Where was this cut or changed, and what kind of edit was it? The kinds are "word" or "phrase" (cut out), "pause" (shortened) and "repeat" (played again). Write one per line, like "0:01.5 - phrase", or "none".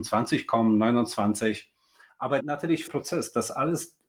0:02.4 - word
0:02.9 - phrase

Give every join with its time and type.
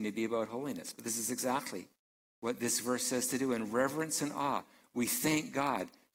none

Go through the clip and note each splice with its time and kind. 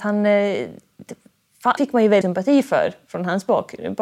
0:01.8 - word
0:02.2 - word

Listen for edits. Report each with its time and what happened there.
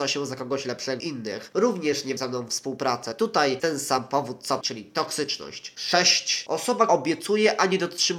0:01.0 - word
0:02.2 - word
0:02.5 - word
0:03.6 - word
0:04.6 - word
0:06.9 - word

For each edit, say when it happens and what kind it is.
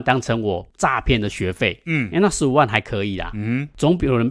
none

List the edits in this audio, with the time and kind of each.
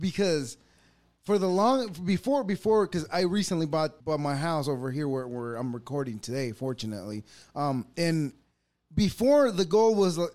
0:04.0 - pause

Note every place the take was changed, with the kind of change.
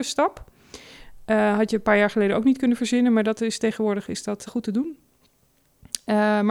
0:04.5 - word

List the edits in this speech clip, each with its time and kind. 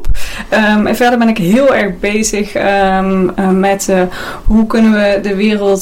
none

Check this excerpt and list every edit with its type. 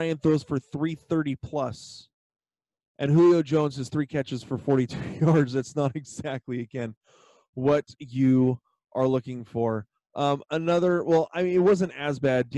none

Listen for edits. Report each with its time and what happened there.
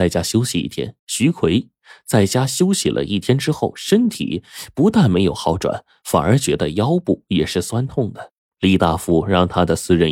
0:01.0 - pause
0:08.4 - pause

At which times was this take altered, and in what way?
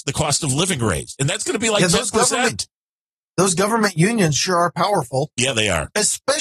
none

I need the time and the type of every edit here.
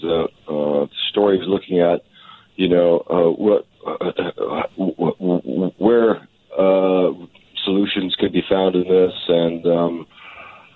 none

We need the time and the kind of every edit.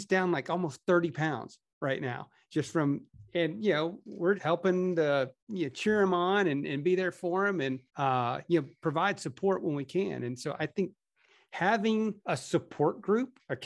0:04.4 - word
0:05.4 - pause
0:07.9 - pause
0:12.2 - pause

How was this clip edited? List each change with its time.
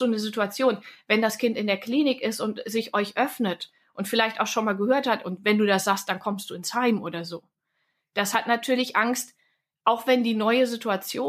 none

